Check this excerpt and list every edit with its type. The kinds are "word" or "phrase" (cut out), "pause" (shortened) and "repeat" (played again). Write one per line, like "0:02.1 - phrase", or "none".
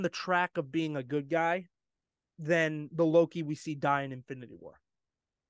none